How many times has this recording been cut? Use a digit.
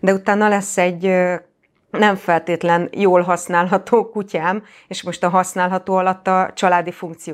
0